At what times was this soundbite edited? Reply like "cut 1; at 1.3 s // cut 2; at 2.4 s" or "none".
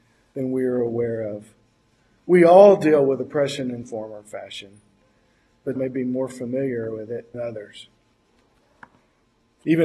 cut 1; at 3.8 s // cut 2; at 5.8 s // cut 3; at 7.3 s